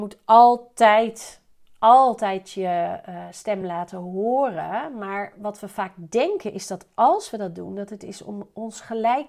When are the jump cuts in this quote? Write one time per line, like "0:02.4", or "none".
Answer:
none